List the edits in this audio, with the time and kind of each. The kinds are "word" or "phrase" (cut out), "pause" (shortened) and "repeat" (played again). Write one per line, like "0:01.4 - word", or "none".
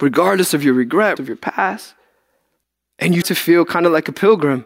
0:01.2 - word
0:02.6 - pause
0:03.2 - word